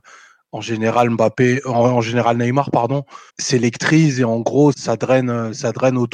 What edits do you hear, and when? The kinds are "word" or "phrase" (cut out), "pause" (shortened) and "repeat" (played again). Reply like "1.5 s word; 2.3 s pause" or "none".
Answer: 3.3 s pause; 4.7 s word